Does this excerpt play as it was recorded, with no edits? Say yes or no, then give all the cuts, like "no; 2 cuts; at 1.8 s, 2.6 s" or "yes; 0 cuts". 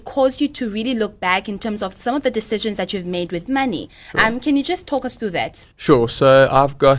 no; 1 cut; at 5.7 s